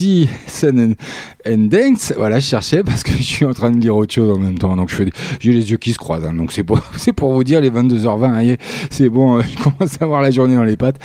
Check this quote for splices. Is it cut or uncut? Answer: uncut